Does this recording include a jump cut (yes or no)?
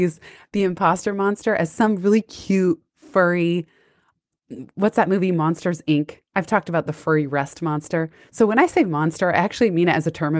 yes